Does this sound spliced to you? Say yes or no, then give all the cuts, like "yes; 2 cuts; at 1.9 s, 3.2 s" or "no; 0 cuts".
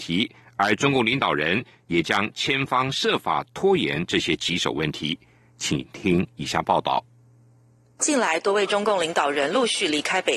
no; 0 cuts